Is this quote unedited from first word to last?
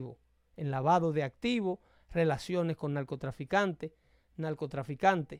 yes; 0 cuts

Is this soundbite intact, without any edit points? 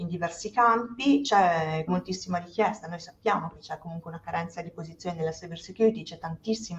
no; 1 cut; at 1.9 s

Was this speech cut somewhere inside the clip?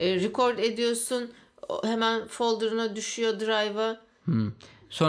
no; 0 cuts

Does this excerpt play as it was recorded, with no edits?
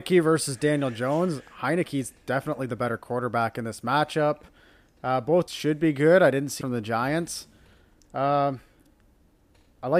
no; 2 cuts; at 5.5 s, 6.6 s

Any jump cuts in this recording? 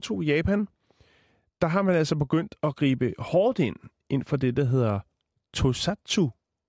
no; 0 cuts

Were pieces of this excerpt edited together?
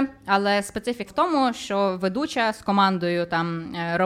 yes; 1 cut; at 1.1 s

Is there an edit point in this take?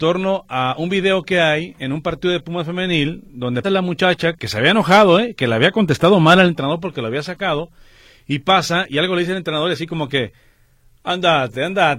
yes; 2 cuts; at 3.6 s, 4.4 s

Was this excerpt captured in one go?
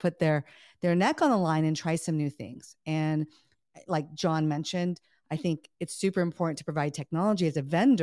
yes; 0 cuts

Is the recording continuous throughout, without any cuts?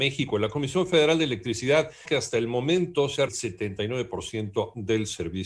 no; 2 cuts; at 2.0 s, 3.3 s

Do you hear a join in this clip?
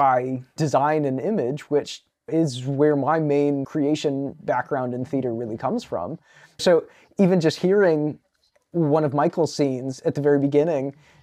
no; 0 cuts

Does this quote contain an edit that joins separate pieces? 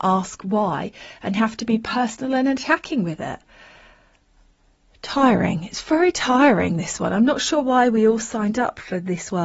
no; 0 cuts

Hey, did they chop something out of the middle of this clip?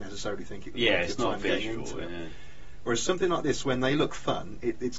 no; 0 cuts

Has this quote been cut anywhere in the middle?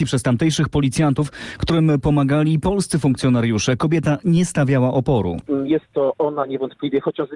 no; 0 cuts

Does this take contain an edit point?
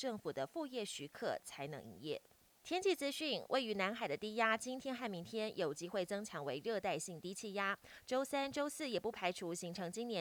no; 0 cuts

